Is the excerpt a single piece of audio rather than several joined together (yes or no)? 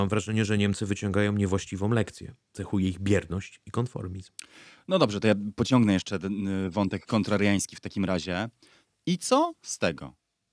yes